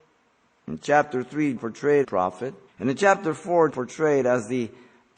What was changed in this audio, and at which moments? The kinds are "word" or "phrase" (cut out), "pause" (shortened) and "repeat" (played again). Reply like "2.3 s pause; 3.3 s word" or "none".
1.6 s word; 2.0 s phrase; 2.7 s pause; 3.7 s word